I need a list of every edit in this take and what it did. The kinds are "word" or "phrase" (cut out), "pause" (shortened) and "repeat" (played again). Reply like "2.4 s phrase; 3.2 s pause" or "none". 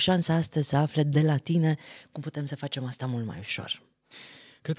none

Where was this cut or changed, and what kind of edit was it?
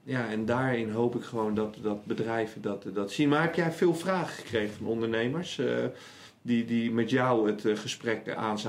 none

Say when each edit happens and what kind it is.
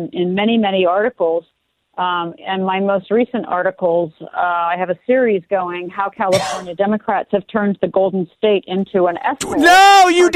none

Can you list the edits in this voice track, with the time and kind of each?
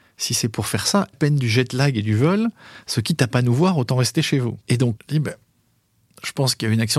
1.1 s phrase; 4.6 s pause; 5.0 s word

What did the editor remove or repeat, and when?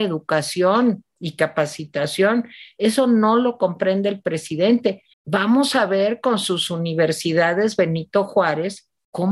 5.1 s pause

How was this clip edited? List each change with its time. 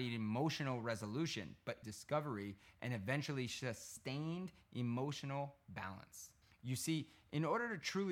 1.8 s word; 6.4 s pause

